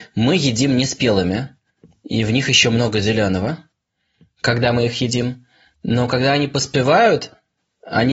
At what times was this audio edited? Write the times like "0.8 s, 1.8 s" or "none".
none